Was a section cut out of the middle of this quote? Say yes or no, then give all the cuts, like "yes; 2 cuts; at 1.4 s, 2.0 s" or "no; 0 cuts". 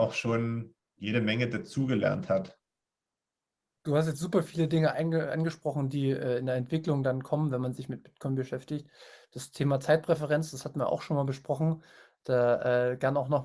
no; 0 cuts